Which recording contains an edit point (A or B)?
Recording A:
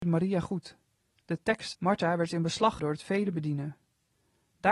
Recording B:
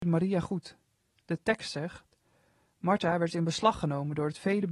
A